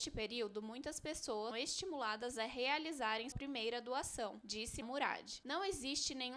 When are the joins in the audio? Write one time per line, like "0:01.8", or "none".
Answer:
0:01.5
0:03.3
0:04.8